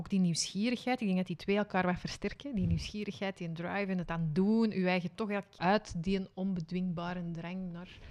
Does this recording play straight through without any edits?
no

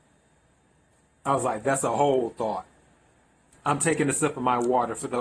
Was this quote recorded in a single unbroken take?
yes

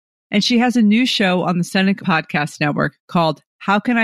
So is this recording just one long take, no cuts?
no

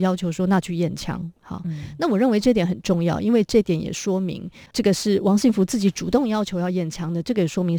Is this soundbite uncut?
yes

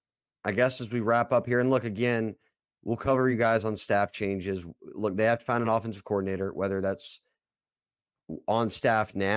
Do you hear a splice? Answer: no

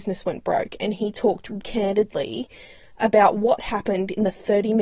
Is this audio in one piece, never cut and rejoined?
no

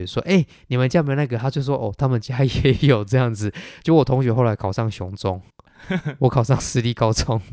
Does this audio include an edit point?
yes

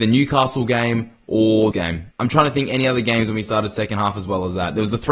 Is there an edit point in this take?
yes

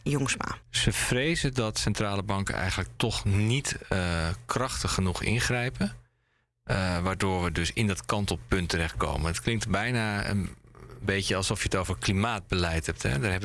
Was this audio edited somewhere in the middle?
no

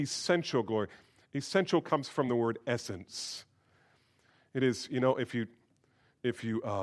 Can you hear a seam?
no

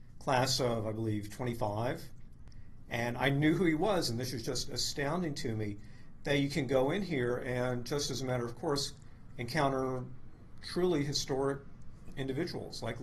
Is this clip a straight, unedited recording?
yes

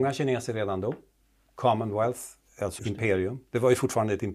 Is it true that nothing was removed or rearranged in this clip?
no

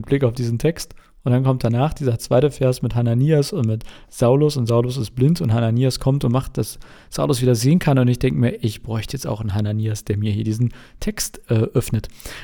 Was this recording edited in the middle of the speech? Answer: no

